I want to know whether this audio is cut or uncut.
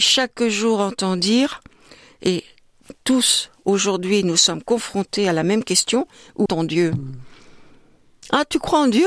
cut